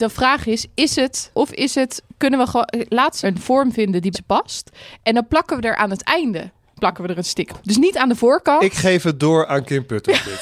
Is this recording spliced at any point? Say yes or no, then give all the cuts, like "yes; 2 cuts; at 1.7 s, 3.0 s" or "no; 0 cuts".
yes; 4 cuts; at 1.3 s, 3.2 s, 4.1 s, 7.5 s